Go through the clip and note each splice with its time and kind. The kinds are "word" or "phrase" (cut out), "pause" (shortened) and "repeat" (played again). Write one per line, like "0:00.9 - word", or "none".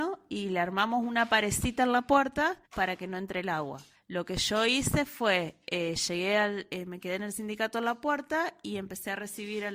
0:02.6 - pause
0:03.9 - pause